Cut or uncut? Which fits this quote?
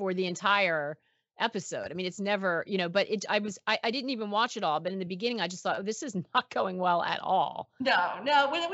uncut